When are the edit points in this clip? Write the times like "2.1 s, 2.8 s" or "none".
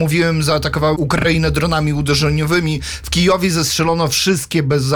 0.9 s